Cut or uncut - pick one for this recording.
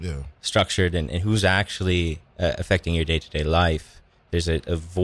cut